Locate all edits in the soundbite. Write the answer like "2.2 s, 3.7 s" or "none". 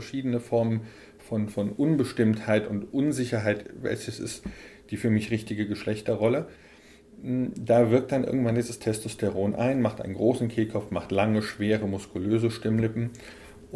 none